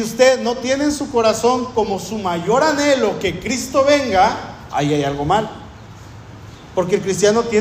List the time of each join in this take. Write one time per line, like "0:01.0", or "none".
none